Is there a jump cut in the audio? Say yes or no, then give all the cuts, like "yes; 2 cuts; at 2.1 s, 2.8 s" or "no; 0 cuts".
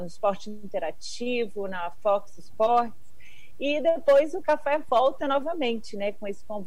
no; 0 cuts